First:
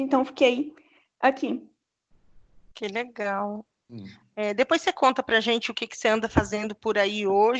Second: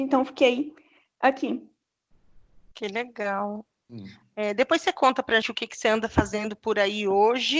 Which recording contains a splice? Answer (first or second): second